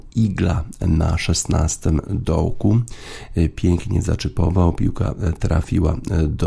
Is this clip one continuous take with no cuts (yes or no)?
yes